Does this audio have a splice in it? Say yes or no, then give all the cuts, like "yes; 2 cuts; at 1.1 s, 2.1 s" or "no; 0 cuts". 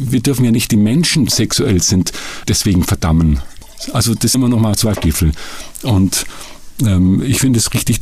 yes; 4 cuts; at 1.3 s, 2.4 s, 4.3 s, 5.0 s